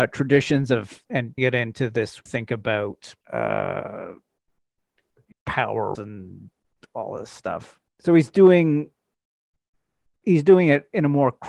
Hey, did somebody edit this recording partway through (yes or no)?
yes